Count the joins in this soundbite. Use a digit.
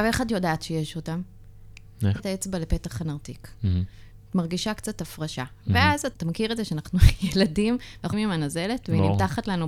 3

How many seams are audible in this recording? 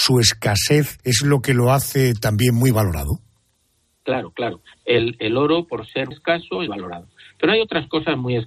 3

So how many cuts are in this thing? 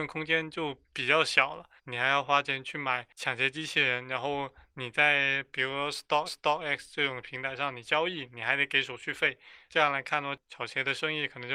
2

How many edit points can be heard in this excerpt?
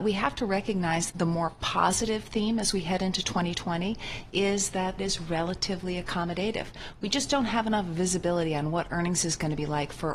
2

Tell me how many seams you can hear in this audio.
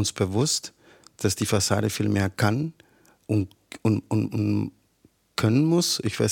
0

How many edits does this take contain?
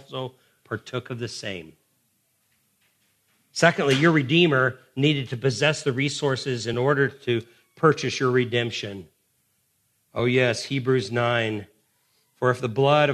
0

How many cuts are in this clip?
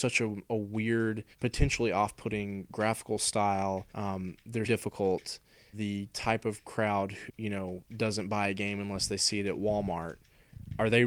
5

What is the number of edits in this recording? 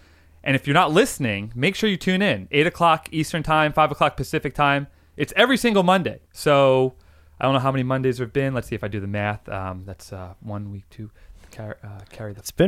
1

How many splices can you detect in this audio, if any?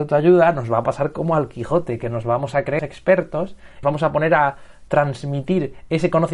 2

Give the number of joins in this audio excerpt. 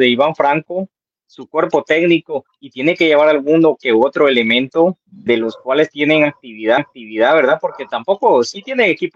2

